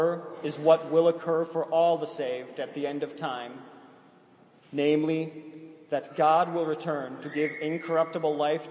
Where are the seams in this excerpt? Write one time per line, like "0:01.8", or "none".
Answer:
none

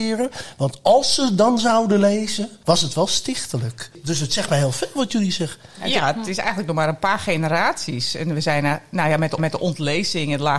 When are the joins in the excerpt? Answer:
0:09.4

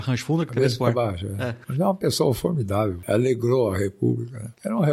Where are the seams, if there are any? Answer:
none

